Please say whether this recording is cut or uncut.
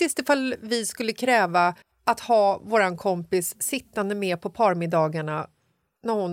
cut